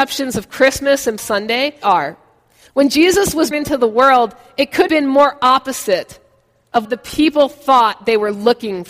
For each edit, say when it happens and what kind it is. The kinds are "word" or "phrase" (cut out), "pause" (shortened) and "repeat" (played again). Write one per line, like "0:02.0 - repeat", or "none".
0:01.2 - word
0:01.8 - word
0:03.5 - word
0:04.9 - word
0:06.8 - word